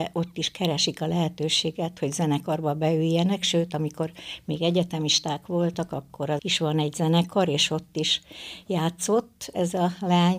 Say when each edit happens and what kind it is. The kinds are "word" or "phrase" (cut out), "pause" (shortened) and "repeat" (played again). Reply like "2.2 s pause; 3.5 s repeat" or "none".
6.4 s word